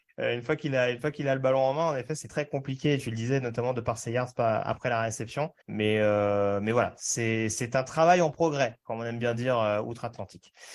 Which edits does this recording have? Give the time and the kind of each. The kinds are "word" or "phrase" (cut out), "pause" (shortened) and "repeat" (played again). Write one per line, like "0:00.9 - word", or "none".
0:02.3 - word
0:05.6 - pause